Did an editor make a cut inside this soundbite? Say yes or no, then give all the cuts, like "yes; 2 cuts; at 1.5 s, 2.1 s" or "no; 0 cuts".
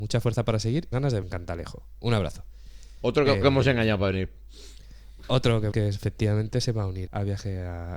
yes; 5 cuts; at 0.9 s, 1.2 s, 3.4 s, 5.7 s, 7.1 s